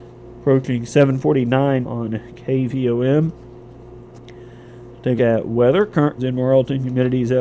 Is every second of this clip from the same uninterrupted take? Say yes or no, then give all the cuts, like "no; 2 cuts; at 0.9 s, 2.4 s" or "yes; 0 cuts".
no; 3 cuts; at 1.8 s, 5.2 s, 6.2 s